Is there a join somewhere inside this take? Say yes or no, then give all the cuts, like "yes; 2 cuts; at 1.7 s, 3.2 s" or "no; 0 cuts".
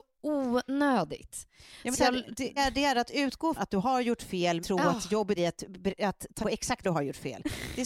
yes; 7 cuts; at 1.9 s, 2.6 s, 3.6 s, 4.6 s, 5.4 s, 6.4 s, 6.8 s